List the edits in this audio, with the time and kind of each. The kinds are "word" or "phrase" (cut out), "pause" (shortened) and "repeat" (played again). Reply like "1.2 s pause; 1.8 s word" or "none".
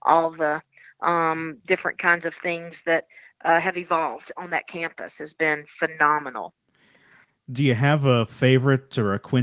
none